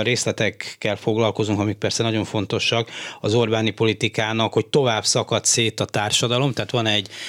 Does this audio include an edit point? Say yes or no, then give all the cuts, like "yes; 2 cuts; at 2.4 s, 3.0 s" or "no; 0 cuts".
no; 0 cuts